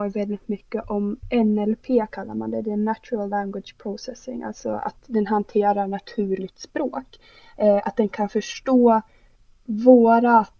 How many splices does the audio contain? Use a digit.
0